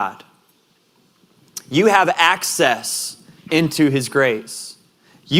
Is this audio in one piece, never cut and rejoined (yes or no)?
no